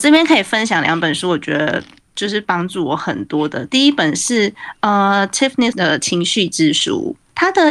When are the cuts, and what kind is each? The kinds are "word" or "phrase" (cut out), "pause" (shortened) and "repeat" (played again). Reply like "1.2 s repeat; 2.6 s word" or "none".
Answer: 5.7 s word